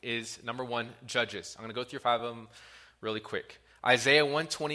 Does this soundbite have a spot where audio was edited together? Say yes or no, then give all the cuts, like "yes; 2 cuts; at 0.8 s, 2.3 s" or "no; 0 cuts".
no; 0 cuts